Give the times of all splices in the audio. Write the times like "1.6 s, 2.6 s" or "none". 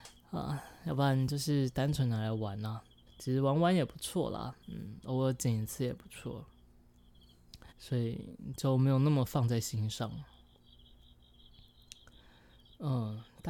3.1 s, 4.6 s, 7.7 s